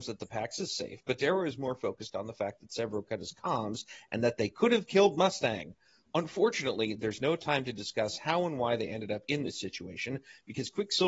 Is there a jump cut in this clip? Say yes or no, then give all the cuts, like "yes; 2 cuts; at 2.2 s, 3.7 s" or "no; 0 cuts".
no; 0 cuts